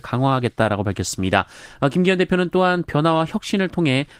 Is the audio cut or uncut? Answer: uncut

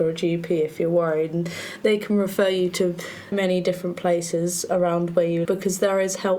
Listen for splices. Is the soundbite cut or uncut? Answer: cut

